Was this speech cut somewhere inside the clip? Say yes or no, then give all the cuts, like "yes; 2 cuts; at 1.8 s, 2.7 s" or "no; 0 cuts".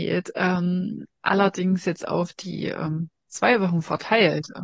yes; 1 cut; at 3.2 s